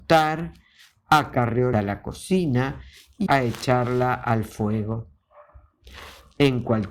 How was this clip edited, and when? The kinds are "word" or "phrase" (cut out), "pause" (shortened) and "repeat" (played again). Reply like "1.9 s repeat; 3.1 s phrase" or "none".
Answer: 1.7 s phrase; 3.3 s word